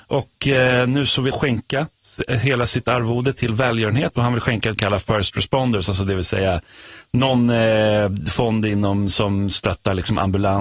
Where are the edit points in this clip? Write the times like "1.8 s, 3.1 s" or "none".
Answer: 1.3 s, 4.8 s